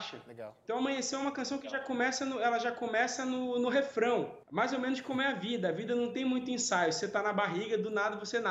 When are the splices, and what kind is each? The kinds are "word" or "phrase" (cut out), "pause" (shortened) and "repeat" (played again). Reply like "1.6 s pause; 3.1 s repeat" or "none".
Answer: 4.4 s pause